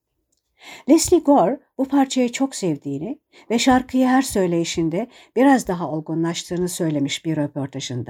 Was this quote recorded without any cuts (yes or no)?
yes